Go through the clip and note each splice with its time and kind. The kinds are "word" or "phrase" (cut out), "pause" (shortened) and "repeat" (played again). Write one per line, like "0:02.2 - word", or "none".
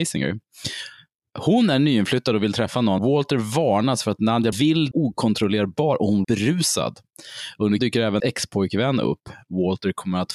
0:03.0 - word
0:04.5 - word
0:04.9 - word
0:06.2 - word
0:07.8 - word
0:08.2 - word